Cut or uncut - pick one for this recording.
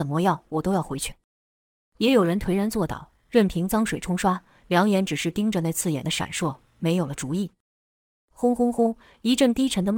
uncut